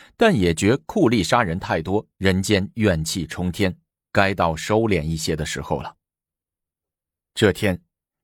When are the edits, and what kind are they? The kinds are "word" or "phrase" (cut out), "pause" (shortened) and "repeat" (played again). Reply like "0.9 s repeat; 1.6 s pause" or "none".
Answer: none